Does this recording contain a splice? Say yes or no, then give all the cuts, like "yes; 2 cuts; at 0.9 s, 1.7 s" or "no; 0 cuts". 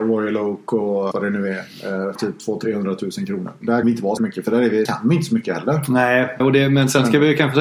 yes; 6 cuts; at 1.1 s, 2.2 s, 3.8 s, 4.2 s, 4.9 s, 6.4 s